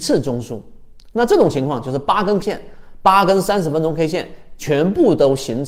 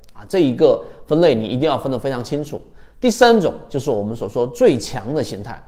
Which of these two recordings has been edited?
first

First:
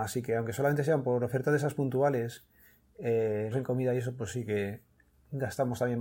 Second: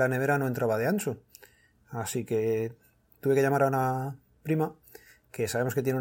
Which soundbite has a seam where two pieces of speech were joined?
first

